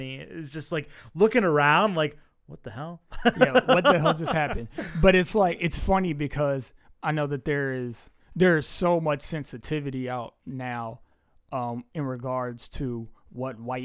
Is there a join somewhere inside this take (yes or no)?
no